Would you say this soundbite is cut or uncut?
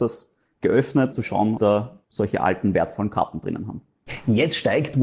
cut